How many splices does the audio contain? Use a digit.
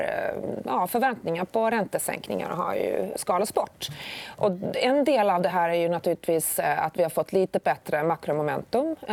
0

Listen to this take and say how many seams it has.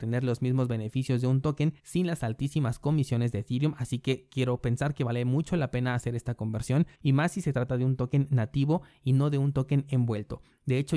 2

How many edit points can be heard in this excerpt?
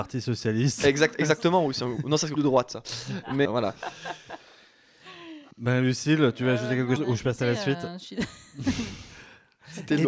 4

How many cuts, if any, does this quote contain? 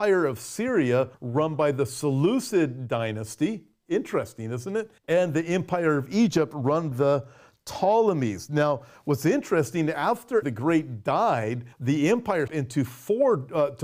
6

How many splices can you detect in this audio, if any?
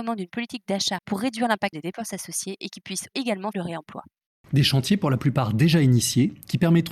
3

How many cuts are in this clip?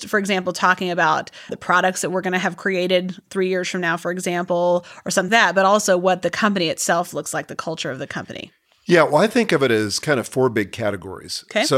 2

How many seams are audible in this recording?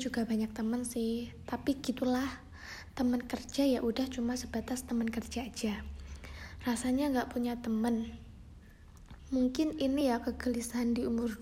0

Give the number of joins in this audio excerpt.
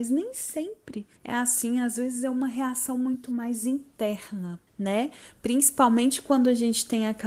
2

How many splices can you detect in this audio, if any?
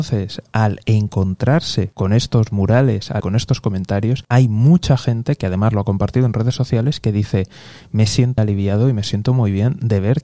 2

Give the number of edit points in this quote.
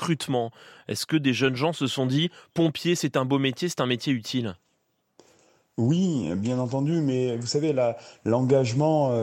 0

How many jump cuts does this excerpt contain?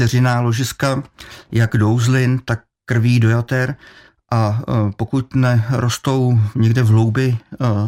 0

